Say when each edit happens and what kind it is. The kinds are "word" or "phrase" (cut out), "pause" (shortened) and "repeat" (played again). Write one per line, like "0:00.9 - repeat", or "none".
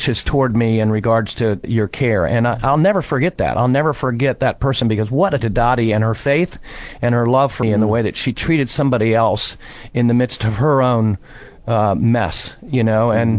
0:01.6 - word
0:05.4 - word
0:07.6 - word